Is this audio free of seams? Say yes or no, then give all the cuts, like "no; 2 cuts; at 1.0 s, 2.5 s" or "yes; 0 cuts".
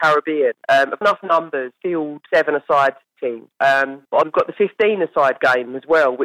no; 3 cuts; at 1.0 s, 2.3 s, 4.2 s